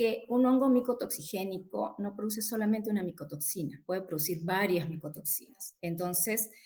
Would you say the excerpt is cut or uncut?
uncut